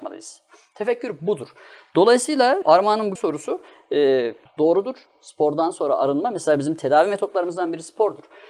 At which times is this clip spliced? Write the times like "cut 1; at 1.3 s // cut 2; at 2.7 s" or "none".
cut 1; at 2.6 s // cut 2; at 3.2 s // cut 3; at 4.5 s